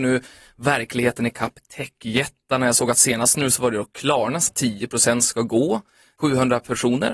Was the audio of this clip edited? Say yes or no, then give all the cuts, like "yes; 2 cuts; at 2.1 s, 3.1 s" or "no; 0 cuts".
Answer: yes; 1 cut; at 4.5 s